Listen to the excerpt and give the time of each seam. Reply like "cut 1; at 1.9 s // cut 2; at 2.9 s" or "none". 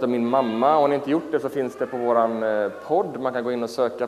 none

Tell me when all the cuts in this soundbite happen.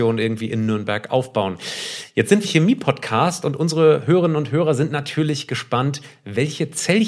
cut 1; at 2.4 s

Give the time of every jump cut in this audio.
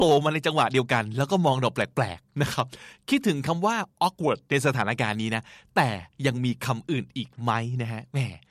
cut 1; at 2.3 s

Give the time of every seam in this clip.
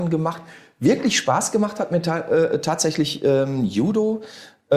none

